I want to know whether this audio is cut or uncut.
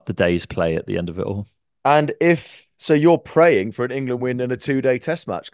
uncut